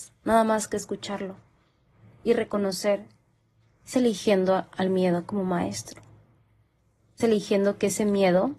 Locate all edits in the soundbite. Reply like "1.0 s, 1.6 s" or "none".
3.9 s, 7.2 s